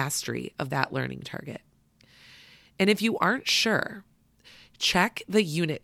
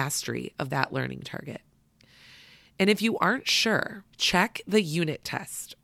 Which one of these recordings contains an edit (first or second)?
second